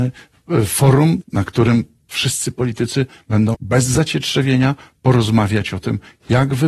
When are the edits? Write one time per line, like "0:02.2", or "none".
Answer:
0:01.2
0:03.5

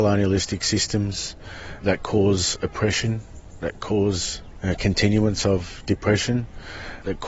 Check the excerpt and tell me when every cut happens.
none

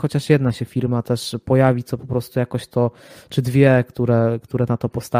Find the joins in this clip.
none

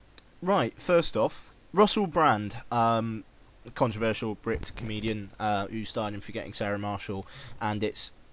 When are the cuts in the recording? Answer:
0:01.6

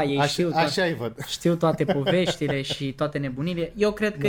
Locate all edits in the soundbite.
none

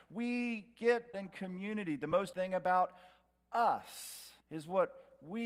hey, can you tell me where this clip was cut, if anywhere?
0:01.1
0:02.3
0:04.4

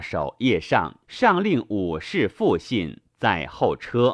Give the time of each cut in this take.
0:01.0
0:03.1

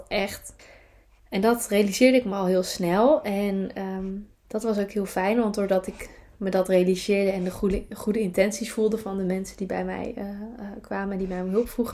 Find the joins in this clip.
none

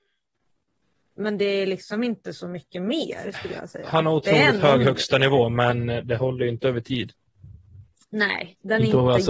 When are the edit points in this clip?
none

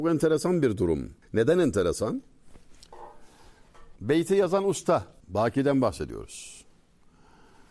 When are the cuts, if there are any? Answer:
0:01.2
0:04.0
0:05.2

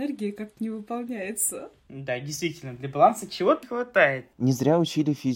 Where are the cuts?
0:03.6

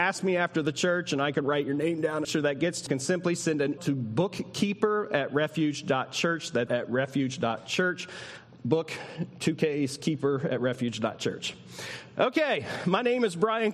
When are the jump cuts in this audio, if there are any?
0:02.2
0:02.9
0:03.8
0:06.7

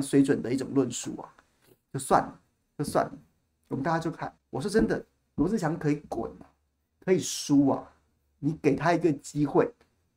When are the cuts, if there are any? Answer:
0:04.4

